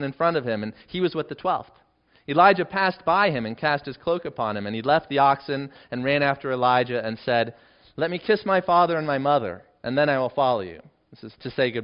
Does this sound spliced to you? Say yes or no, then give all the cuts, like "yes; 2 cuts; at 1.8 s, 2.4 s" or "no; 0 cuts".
no; 0 cuts